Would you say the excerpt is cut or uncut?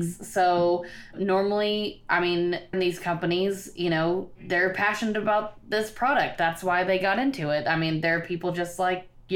cut